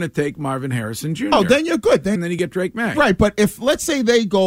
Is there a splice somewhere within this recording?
yes; 1 cut; at 2.2 s

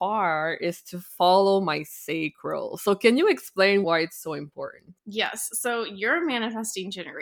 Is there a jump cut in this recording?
yes; 2 cuts; at 3.8 s, 5.0 s

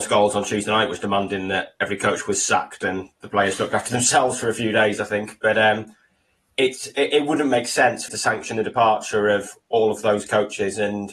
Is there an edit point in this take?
yes; 1 cut; at 8.1 s

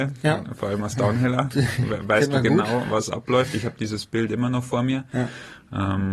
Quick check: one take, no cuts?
yes; 0 cuts

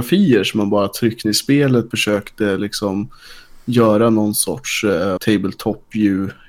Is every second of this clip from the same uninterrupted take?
no; 3 cuts; at 1.2 s, 1.9 s, 5.2 s

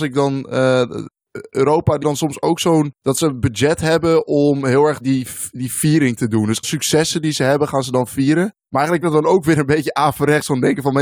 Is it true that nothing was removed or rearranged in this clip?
no; 5 cuts; at 2.0 s, 3.0 s, 5.0 s, 6.6 s, 9.0 s

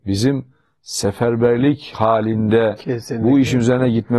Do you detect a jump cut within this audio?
no; 0 cuts

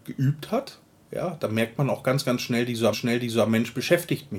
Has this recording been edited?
yes; 1 cut; at 2.9 s

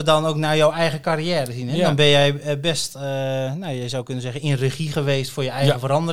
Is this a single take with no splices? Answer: yes; 0 cuts

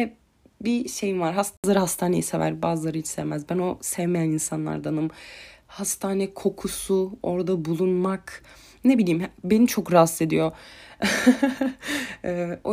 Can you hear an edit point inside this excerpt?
no; 0 cuts

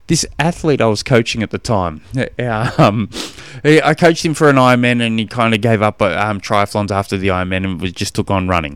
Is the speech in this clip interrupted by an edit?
no; 0 cuts

